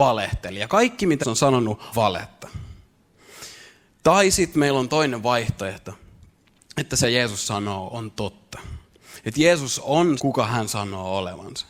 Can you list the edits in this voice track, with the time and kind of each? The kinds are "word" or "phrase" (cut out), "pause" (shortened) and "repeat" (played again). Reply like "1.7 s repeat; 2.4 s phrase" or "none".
1.2 s word; 1.9 s word; 7.0 s word; 10.2 s word